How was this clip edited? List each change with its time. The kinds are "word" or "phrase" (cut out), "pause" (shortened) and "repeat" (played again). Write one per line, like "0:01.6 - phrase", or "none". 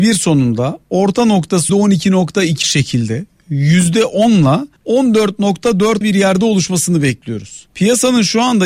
0:01.7 - word
0:02.6 - word
0:04.8 - pause
0:06.0 - word
0:07.7 - pause